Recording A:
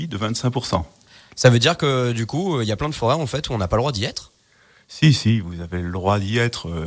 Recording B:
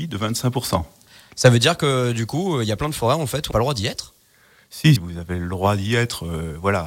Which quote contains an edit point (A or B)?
B